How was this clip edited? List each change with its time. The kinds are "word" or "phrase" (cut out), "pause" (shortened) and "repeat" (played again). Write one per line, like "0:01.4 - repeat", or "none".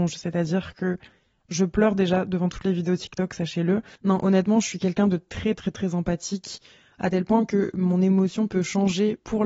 none